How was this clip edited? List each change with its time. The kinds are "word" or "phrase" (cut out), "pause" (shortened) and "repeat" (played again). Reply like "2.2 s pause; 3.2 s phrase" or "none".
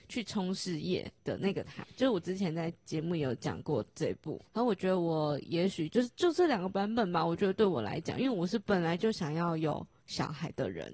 1.2 s pause; 4.5 s pause